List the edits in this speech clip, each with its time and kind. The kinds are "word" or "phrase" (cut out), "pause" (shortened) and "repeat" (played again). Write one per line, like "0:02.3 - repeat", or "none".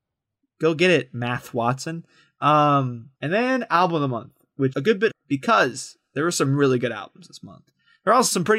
0:03.1 - pause
0:04.7 - word
0:05.1 - word